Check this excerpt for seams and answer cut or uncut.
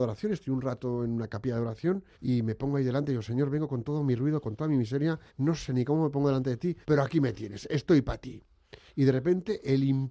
cut